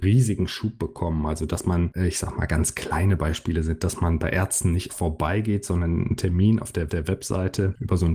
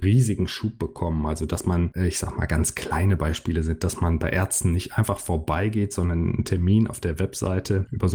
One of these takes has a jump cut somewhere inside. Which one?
first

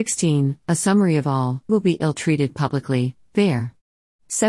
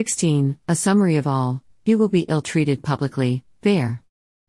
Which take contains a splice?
first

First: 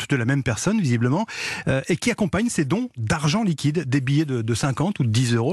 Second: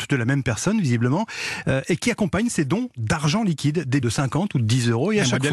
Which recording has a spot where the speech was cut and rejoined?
second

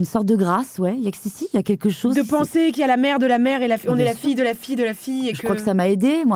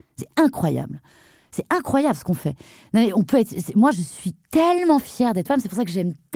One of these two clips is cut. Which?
second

